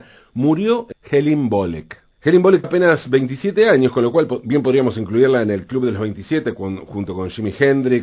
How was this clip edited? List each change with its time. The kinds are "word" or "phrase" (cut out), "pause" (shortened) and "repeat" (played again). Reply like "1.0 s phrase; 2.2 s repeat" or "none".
0.9 s phrase; 2.1 s pause; 2.6 s word